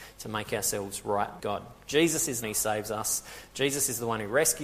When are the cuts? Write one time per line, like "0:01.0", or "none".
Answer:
0:01.4
0:02.4